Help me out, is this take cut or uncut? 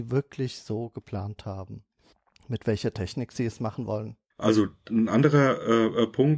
uncut